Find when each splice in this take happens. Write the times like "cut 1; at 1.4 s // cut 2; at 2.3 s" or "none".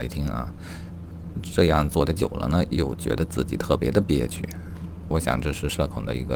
cut 1; at 5.1 s

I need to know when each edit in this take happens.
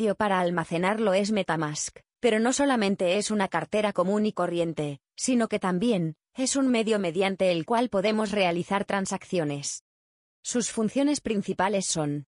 none

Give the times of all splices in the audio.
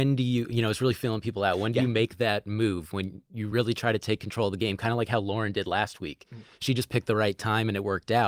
none

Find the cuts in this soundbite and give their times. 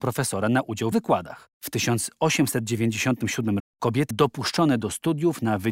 cut 1; at 0.9 s // cut 2; at 1.5 s // cut 3; at 3.6 s // cut 4; at 4.1 s

